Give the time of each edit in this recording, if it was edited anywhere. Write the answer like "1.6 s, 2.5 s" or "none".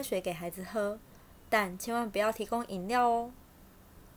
none

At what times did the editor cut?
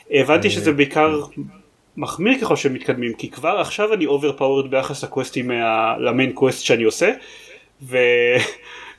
none

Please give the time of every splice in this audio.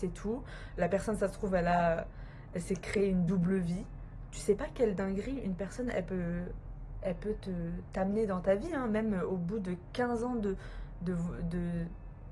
none

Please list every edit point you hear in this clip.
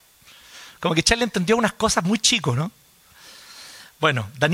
none

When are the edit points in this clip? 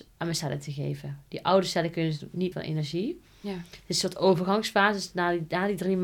2.5 s

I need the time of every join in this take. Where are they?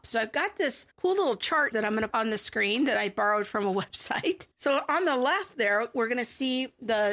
0.9 s, 1.7 s, 2.1 s, 4.5 s

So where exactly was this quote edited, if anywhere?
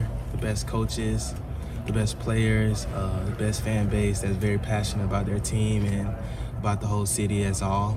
none

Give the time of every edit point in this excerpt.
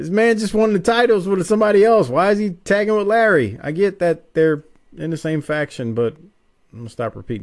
none

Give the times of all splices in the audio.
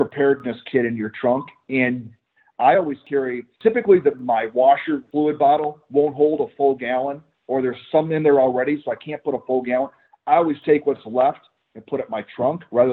none

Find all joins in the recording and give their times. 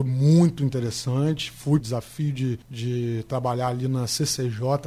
1.8 s, 2.6 s

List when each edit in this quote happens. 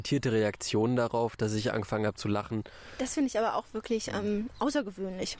none

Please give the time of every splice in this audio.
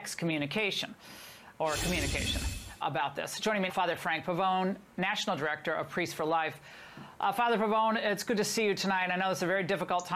2.8 s, 3.7 s

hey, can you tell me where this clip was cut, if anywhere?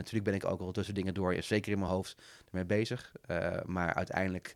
none

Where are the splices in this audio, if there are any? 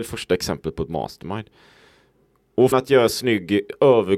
2.7 s

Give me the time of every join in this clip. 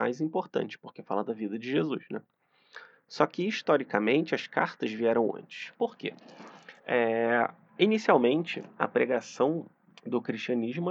6.8 s, 9.9 s

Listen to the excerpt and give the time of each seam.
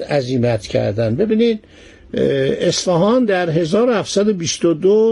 none

